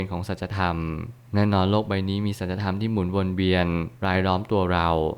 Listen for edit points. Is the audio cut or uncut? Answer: cut